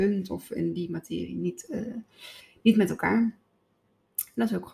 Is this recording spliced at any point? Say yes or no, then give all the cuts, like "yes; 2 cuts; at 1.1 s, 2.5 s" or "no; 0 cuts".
no; 0 cuts